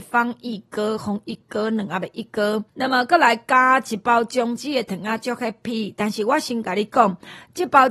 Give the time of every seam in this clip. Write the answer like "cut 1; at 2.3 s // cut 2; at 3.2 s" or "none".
cut 1; at 2.7 s

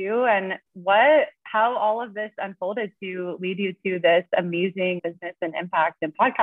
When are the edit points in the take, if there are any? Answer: cut 1; at 5.0 s

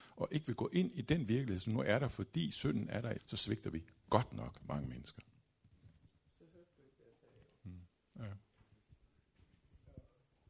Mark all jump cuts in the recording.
cut 1; at 3.2 s

